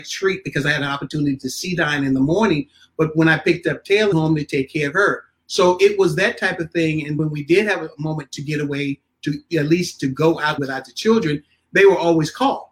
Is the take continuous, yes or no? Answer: no